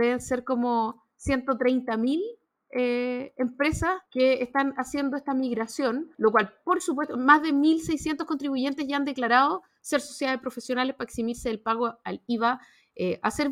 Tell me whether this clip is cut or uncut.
cut